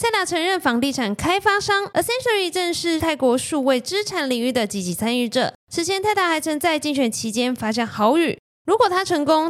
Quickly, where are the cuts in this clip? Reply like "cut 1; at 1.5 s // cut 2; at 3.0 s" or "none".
cut 1; at 1.9 s